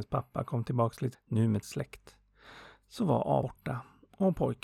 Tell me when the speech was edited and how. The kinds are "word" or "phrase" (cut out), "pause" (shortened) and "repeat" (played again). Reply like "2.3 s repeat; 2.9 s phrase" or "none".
1.1 s word; 1.6 s word; 3.4 s word